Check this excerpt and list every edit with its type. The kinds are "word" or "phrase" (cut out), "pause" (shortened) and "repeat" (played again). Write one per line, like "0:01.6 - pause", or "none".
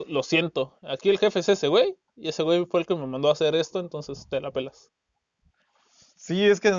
none